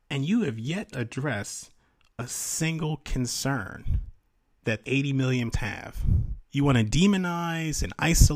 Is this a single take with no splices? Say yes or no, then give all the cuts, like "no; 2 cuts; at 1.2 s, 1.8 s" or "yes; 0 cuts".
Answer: no; 4 cuts; at 0.9 s, 4.8 s, 5.5 s, 6.4 s